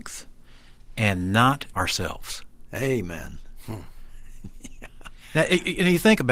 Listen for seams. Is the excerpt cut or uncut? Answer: cut